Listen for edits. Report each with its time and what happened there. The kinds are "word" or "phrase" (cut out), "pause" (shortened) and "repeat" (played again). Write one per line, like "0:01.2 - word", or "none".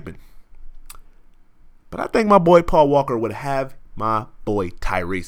0:01.8 - pause

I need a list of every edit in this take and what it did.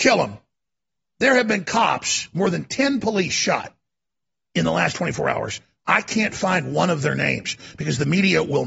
none

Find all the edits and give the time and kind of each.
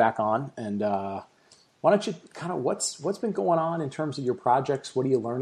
none

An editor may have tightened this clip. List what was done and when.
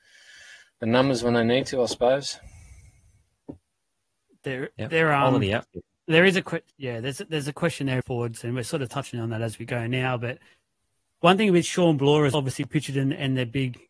0:06.7 - pause
0:08.0 - phrase
0:12.3 - word

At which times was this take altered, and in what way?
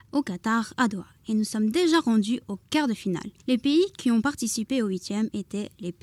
0:03.4 - pause

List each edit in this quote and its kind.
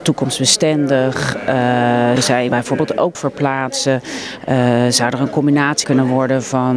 0:02.2 - word
0:02.5 - word
0:03.1 - word
0:05.8 - word

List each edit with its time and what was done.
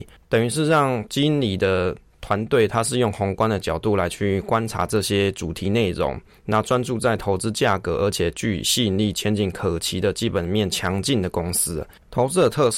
none

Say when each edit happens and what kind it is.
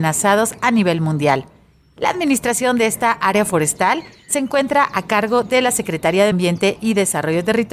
0:06.3 - word

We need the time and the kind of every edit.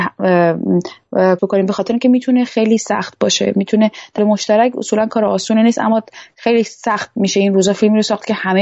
0:01.4 - word
0:02.5 - word
0:04.2 - phrase

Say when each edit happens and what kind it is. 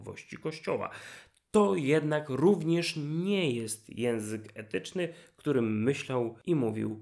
none

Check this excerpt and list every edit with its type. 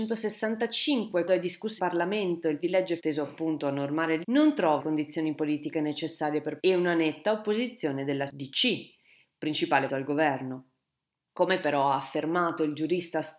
0:01.3 - word
0:01.8 - word
0:02.6 - word
0:03.0 - word
0:04.2 - word
0:04.8 - word
0:06.6 - word
0:09.9 - word

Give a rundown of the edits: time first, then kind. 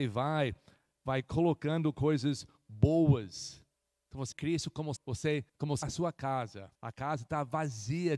0:03.7 - pause
0:04.3 - word
0:05.0 - word
0:05.5 - pause
0:05.8 - word
0:06.7 - pause

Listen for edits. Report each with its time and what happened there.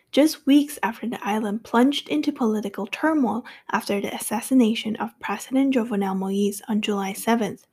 none

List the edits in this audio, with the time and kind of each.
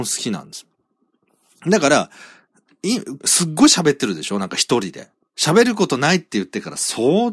0:03.2 - phrase
0:05.2 - pause

